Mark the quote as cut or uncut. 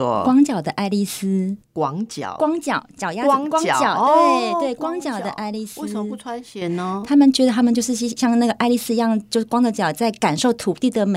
uncut